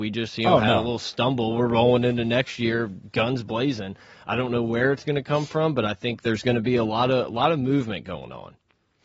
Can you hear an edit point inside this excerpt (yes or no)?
no